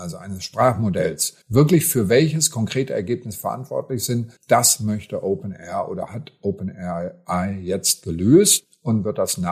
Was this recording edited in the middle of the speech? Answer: yes; 2 cuts; at 1.4 s, 4.4 s

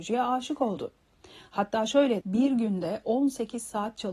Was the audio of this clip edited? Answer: yes; 1 cut; at 2.2 s

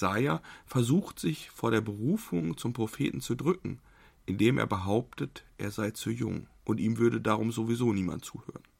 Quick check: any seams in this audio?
yes; 1 cut; at 6.6 s

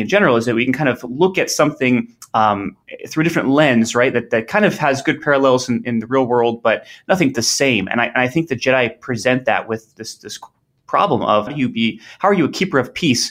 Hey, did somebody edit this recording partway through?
yes; 3 cuts; at 7.3 s, 9.9 s, 11.5 s

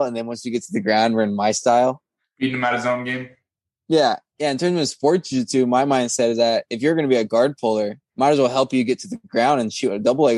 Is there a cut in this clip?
no; 0 cuts

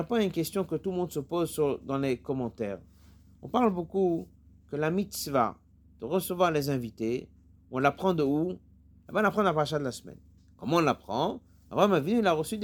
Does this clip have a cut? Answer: no; 0 cuts

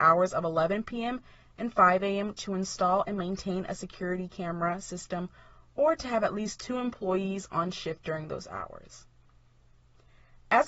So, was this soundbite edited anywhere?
no; 0 cuts

